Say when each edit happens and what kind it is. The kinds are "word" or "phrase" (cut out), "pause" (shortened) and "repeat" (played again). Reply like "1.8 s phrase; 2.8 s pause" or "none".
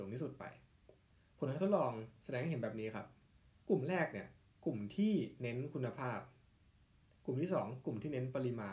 1.1 s pause; 3.3 s pause

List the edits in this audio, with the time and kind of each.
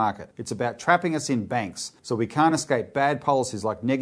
none

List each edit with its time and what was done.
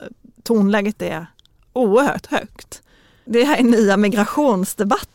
none

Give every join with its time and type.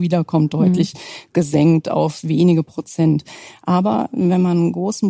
none

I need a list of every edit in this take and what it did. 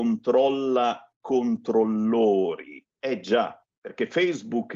1.2 s word; 2.9 s pause; 3.8 s pause

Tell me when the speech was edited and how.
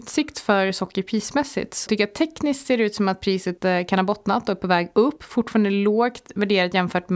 1.9 s word

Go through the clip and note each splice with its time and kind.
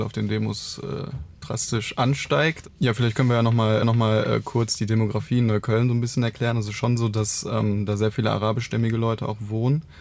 3.8 s repeat

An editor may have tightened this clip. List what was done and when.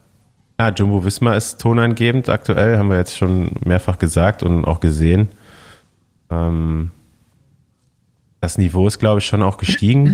none

